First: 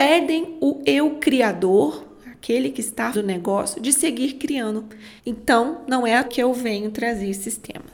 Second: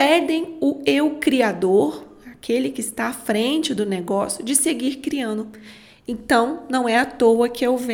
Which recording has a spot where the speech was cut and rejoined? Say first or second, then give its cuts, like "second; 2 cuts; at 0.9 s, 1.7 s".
first; 3 cuts; at 3.1 s, 5.2 s, 6.2 s